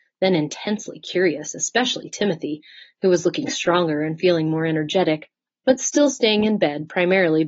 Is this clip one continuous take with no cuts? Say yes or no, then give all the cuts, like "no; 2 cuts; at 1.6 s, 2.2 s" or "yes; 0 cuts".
yes; 0 cuts